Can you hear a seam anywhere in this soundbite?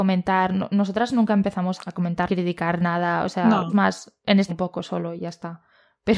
yes; 4 cuts; at 1.8 s, 2.3 s, 3.7 s, 4.5 s

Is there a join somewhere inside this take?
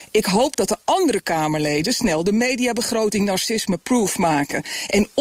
no; 0 cuts

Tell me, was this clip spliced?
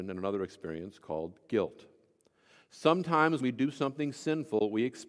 yes; 1 cut; at 3.4 s

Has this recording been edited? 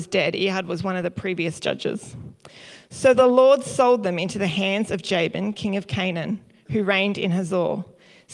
no; 0 cuts

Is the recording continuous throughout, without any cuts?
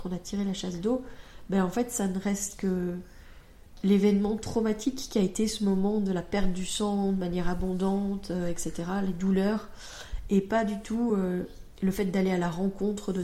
yes; 0 cuts

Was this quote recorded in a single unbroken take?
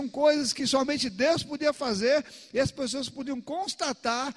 yes; 0 cuts

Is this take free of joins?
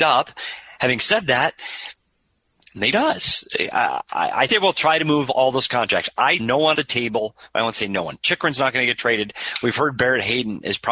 no; 4 cuts; at 2.9 s, 4.5 s, 6.4 s, 6.7 s

